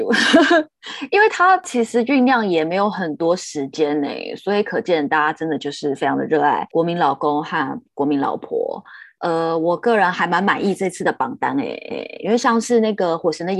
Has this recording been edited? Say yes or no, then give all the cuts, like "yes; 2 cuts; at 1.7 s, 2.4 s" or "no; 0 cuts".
yes; 1 cut; at 11.9 s